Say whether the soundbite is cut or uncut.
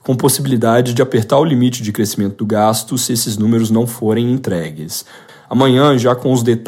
uncut